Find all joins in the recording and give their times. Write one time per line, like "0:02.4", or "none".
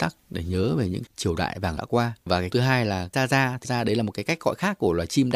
0:01.0
0:01.8
0:02.2
0:02.5
0:03.1
0:03.6